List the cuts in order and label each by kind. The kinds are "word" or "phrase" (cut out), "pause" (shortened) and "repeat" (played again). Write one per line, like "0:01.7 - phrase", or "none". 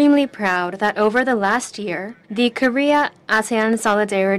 0:02.2 - pause